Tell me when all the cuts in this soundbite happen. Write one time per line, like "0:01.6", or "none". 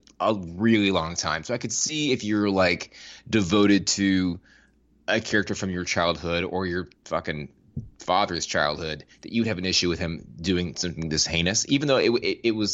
0:07.0